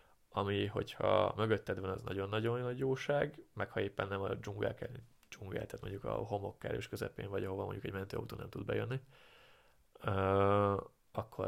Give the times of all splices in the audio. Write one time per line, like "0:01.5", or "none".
none